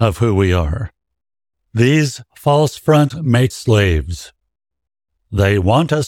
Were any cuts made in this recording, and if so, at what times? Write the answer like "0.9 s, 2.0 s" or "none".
1.3 s, 3.1 s, 3.5 s